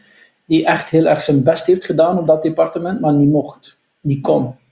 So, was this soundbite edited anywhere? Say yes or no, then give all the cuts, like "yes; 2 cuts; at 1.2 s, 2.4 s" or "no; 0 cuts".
no; 0 cuts